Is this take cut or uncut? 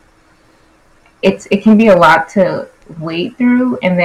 uncut